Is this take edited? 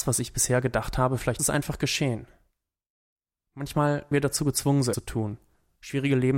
yes; 3 cuts; at 1.4 s, 4.1 s, 4.9 s

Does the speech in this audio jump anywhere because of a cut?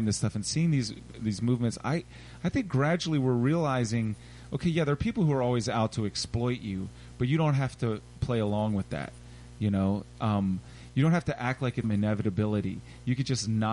yes; 1 cut; at 11.8 s

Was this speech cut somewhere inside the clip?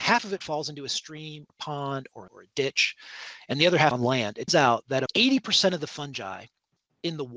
yes; 5 cuts; at 1.5 s, 2.3 s, 3.9 s, 4.5 s, 5.1 s

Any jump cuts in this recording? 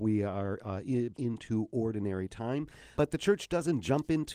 yes; 2 cuts; at 1.1 s, 3.0 s

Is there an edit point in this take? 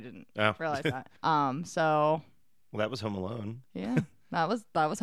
yes; 1 cut; at 1.2 s

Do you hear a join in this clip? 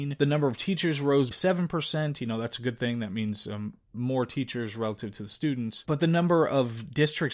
yes; 1 cut; at 1.3 s

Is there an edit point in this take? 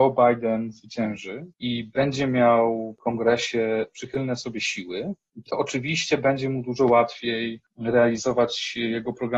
yes; 1 cut; at 1.5 s

